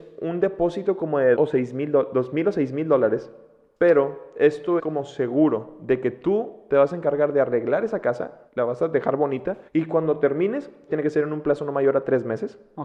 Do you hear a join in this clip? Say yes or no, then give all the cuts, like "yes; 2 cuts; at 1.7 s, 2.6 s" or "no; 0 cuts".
yes; 5 cuts; at 1.4 s, 4.8 s, 8.5 s, 9.7 s, 10.9 s